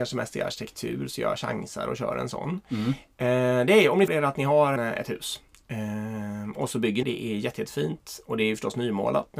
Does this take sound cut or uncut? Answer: cut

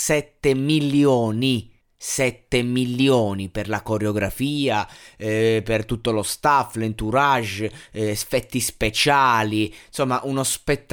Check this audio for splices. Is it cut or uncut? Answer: cut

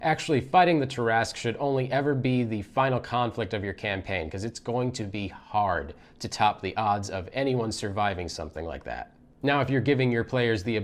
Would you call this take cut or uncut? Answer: uncut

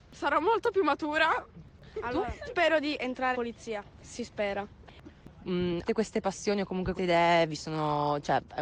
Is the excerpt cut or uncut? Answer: cut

